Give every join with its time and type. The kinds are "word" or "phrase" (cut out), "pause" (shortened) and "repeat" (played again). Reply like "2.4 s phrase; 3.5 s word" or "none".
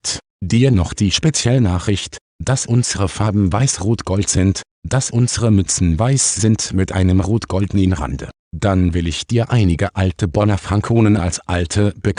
none